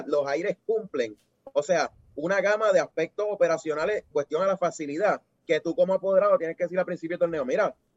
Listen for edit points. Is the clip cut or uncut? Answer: cut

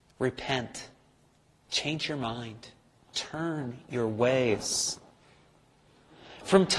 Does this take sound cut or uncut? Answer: uncut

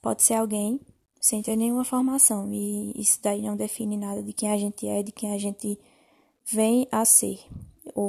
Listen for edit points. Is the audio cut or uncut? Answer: uncut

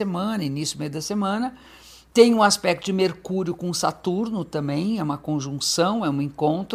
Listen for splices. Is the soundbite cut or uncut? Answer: uncut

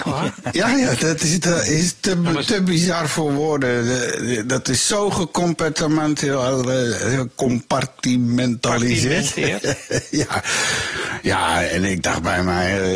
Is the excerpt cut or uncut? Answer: cut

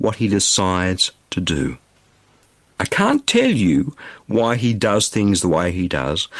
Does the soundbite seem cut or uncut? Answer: uncut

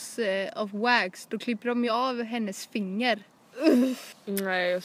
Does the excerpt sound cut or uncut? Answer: uncut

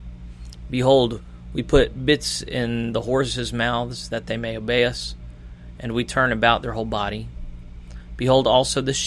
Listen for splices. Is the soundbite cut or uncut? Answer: uncut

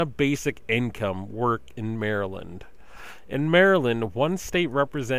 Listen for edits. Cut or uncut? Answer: uncut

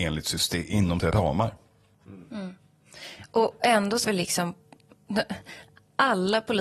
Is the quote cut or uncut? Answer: cut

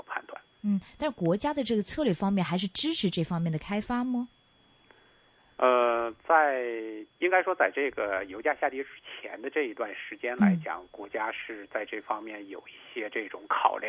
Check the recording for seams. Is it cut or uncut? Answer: cut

